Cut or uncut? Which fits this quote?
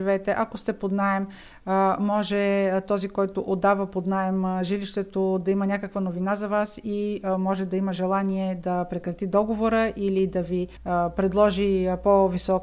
uncut